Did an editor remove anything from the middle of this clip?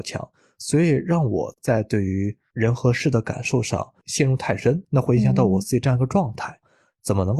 yes; 1 cut; at 4.8 s

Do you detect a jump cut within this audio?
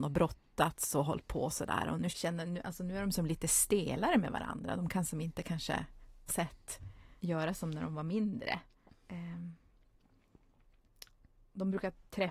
yes; 4 cuts; at 2.1 s, 6.3 s, 7.2 s, 8.9 s

